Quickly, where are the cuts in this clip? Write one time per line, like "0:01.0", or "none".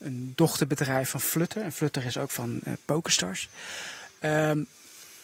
none

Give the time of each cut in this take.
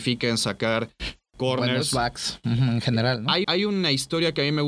0:03.4

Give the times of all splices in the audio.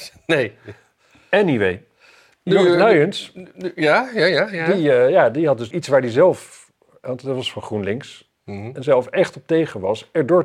0:05.7

